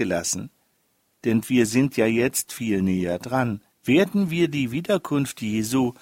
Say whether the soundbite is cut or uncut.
cut